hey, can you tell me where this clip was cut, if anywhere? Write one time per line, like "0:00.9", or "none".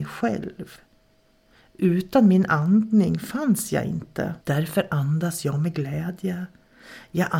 0:04.4